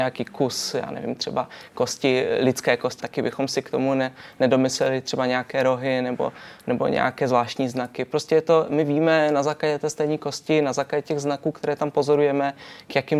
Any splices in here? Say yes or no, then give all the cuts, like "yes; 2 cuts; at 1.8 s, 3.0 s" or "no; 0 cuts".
yes; 1 cut; at 3.0 s